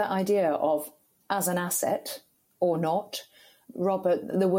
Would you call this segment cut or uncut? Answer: uncut